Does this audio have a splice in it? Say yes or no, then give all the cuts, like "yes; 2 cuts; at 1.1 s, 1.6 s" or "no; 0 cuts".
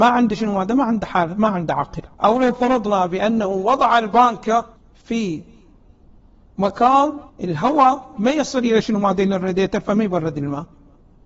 yes; 3 cuts; at 2.1 s, 4.8 s, 7.3 s